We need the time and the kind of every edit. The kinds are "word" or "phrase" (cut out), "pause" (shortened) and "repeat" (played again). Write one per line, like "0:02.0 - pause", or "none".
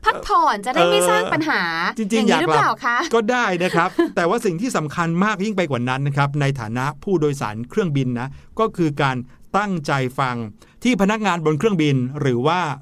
none